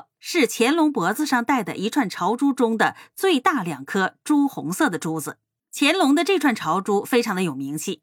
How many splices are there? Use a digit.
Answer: 1